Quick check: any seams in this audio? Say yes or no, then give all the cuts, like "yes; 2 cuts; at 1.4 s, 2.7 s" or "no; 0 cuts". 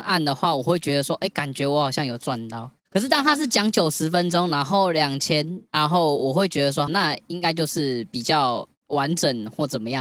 yes; 2 cuts; at 5.7 s, 6.9 s